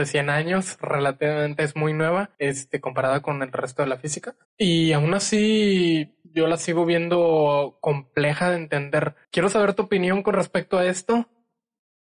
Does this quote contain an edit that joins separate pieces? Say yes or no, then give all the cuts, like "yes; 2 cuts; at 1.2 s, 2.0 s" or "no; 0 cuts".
yes; 4 cuts; at 2.3 s, 4.4 s, 6.2 s, 9.2 s